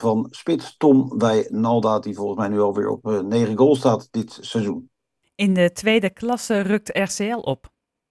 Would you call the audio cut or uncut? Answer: uncut